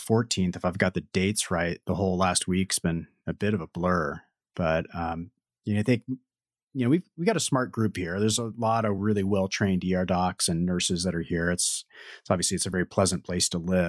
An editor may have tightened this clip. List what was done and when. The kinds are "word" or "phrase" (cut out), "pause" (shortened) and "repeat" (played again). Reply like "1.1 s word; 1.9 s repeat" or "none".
none